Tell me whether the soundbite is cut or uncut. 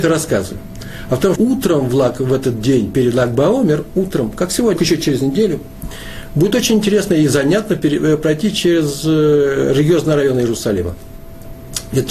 cut